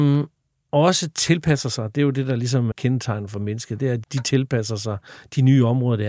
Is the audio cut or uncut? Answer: cut